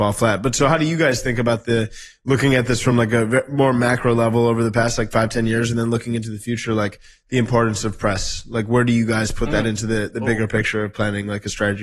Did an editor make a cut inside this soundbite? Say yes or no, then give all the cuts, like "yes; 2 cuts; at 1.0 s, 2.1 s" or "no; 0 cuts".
no; 0 cuts